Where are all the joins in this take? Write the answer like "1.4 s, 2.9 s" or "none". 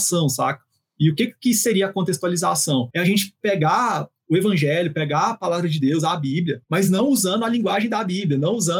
none